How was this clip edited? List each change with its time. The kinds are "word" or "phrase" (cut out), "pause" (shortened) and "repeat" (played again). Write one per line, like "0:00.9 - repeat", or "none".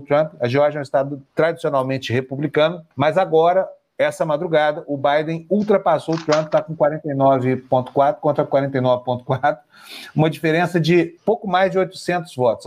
0:01.3 - pause
0:02.9 - pause
0:11.2 - word